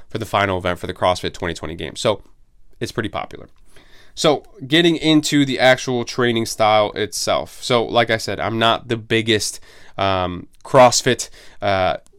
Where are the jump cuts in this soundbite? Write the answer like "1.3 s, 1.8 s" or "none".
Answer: none